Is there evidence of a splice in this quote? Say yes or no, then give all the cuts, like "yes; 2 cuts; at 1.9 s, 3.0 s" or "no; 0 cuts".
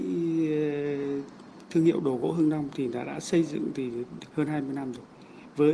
no; 0 cuts